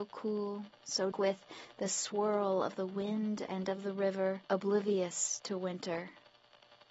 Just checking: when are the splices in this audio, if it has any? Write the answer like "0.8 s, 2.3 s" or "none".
1.1 s, 4.4 s